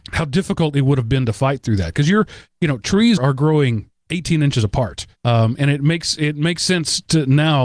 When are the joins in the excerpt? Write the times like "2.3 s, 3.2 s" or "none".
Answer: 3.2 s, 5.2 s